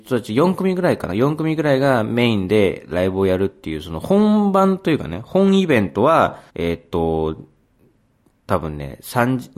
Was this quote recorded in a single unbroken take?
no; 1 cut; at 6.5 s

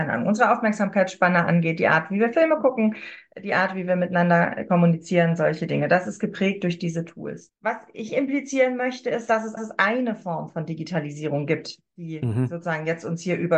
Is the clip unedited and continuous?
no; 3 cuts; at 7.6 s, 8.1 s, 9.6 s

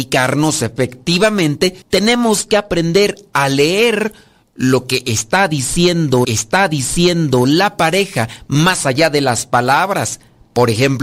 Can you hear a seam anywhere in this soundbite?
yes; 2 cuts; at 1.8 s, 6.2 s

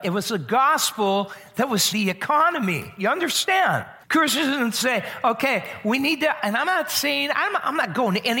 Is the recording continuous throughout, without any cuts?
no; 2 cuts; at 1.9 s, 4.0 s

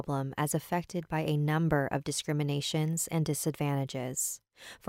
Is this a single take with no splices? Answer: yes; 0 cuts

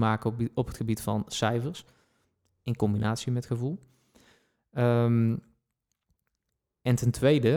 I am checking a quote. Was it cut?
no; 0 cuts

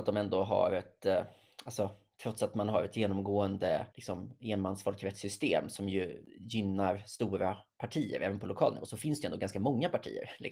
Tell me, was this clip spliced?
yes; 1 cut; at 3.9 s

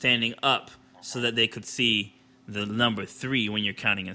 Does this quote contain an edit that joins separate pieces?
no; 0 cuts

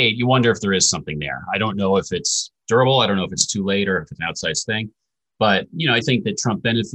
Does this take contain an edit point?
yes; 1 cut; at 6.0 s

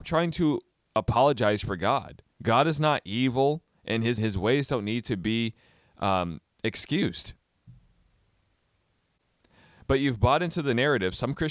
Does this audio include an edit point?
yes; 2 cuts; at 2.3 s, 4.2 s

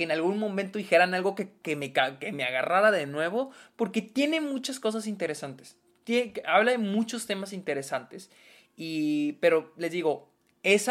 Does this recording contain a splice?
no; 0 cuts

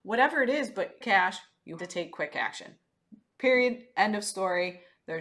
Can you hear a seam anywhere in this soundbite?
yes; 3 cuts; at 1.0 s, 1.8 s, 3.3 s

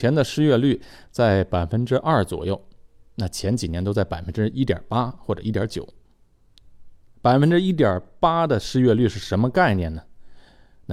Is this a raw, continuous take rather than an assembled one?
yes; 0 cuts

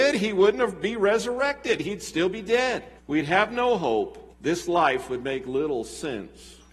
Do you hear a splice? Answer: yes; 2 cuts; at 3.0 s, 4.3 s

